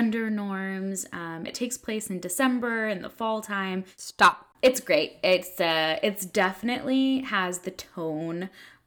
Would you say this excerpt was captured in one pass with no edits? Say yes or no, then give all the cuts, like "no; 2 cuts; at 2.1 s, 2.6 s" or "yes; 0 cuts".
no; 2 cuts; at 1.5 s, 4.5 s